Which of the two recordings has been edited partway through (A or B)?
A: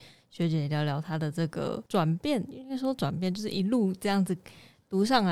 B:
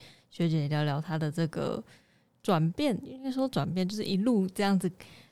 A